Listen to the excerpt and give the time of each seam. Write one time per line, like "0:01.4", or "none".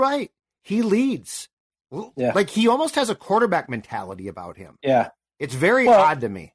none